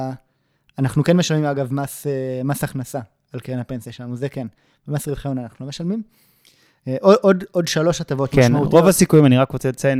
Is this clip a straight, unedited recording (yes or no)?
yes